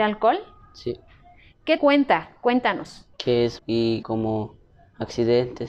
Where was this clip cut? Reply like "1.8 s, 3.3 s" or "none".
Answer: 1.8 s, 3.1 s, 3.6 s, 4.0 s